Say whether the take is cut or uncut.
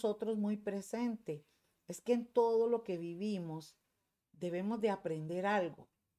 uncut